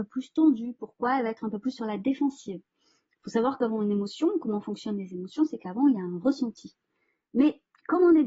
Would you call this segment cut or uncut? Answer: uncut